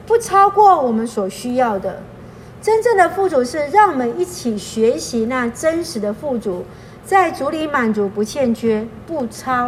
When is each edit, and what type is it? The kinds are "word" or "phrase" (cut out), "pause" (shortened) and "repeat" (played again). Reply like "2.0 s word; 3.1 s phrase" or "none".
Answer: none

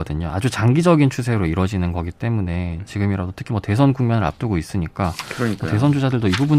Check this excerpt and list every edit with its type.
none

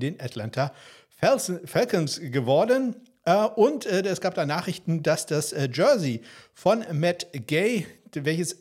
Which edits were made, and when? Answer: none

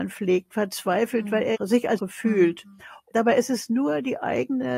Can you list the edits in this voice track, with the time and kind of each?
2.0 s word

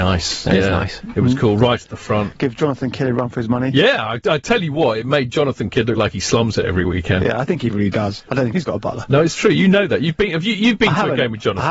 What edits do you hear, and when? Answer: none

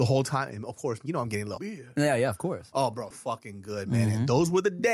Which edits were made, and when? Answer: 1.1 s word; 1.6 s word; 3.1 s word

